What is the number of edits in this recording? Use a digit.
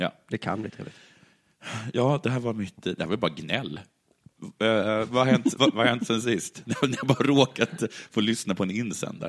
1